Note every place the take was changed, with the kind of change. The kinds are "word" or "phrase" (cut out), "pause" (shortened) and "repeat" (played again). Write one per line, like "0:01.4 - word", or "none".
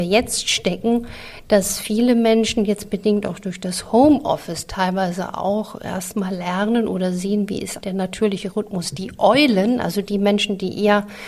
0:07.8 - word